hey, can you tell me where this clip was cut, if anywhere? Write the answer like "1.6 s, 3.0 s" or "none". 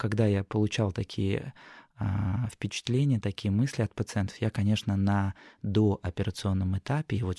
none